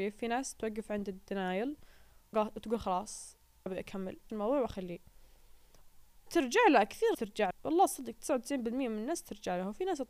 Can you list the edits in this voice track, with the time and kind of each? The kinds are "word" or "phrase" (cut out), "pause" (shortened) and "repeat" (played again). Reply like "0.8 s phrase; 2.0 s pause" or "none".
2.3 s word; 3.7 s word; 4.3 s word; 6.3 s word; 7.1 s word; 7.5 s word